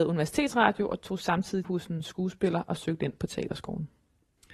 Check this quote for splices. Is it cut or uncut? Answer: cut